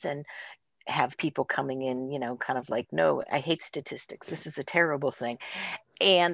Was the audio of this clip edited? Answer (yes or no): no